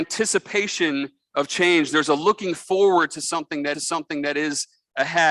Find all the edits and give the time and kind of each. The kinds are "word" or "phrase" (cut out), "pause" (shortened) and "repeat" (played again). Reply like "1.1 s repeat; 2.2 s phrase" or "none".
3.7 s repeat